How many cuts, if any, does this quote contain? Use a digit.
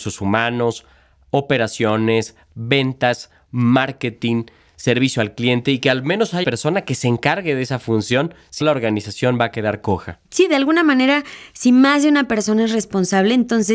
3